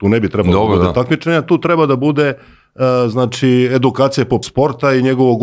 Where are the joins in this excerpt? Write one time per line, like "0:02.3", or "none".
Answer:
0:04.4